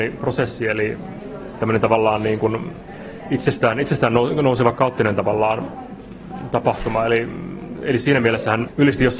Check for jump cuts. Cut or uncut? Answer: cut